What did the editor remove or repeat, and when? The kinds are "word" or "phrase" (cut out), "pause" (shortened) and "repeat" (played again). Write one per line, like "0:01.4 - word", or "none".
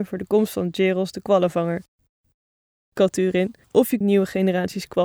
0:03.6 - pause
0:04.0 - word